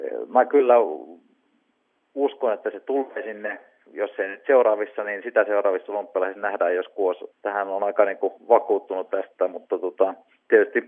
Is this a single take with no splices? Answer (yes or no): no